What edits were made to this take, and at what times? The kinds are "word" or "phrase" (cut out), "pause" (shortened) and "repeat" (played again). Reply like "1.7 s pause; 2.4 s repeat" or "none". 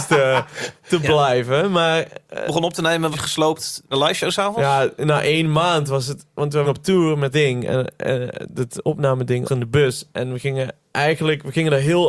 2.5 s phrase; 3.1 s word; 3.9 s word; 6.6 s phrase; 7.3 s word; 9.5 s word